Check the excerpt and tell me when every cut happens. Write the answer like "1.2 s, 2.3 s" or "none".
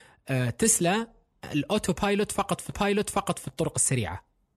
2.7 s